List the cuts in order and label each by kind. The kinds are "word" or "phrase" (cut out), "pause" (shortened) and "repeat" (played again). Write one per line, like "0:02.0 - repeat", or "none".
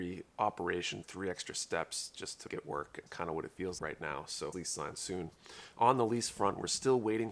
0:01.0 - word
0:02.5 - word
0:03.1 - word
0:03.8 - word
0:04.5 - phrase